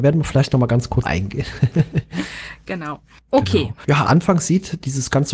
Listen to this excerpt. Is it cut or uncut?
cut